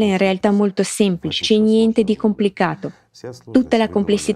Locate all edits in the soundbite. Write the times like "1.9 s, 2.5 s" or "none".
1.4 s